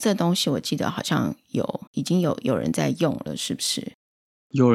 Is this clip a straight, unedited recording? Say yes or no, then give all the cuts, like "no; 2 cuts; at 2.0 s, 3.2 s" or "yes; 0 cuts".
no; 1 cut; at 1.9 s